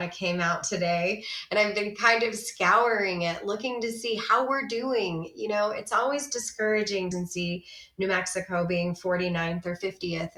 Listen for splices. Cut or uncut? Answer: cut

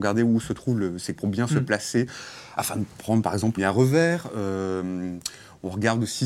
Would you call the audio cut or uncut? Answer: cut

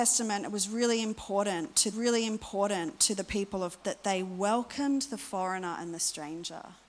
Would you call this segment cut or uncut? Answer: cut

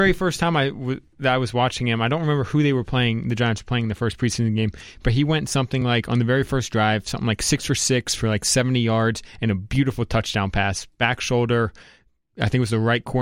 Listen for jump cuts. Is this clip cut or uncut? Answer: uncut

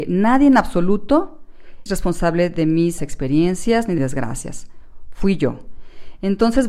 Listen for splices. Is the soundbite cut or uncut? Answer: cut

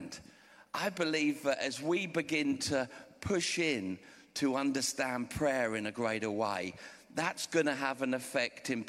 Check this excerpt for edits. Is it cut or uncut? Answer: uncut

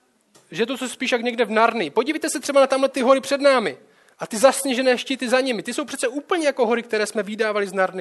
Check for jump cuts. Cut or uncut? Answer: uncut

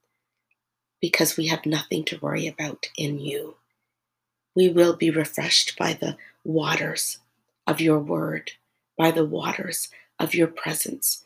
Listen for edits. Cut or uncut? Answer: uncut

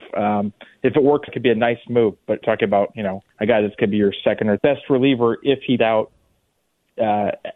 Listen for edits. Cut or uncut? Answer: cut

